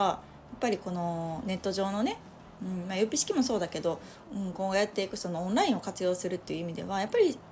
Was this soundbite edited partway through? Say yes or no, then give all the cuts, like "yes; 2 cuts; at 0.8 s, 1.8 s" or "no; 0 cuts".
yes; 1 cut; at 4.2 s